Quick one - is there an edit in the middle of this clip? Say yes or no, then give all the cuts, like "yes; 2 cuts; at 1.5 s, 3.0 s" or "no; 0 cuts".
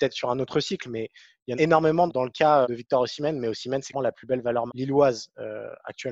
yes; 5 cuts; at 1.6 s, 2.1 s, 2.6 s, 3.9 s, 4.7 s